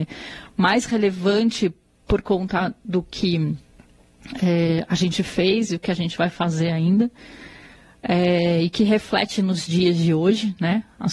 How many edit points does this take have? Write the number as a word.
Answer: zero